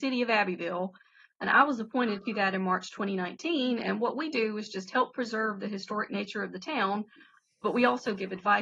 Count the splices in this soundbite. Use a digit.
0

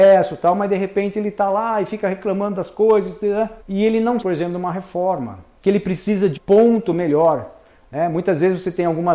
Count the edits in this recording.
3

